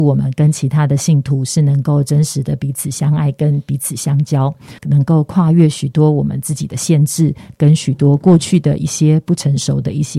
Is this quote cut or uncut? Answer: cut